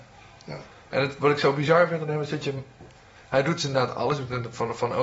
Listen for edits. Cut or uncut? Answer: uncut